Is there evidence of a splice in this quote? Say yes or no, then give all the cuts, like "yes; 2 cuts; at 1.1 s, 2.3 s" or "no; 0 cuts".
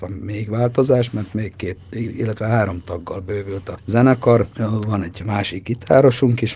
no; 0 cuts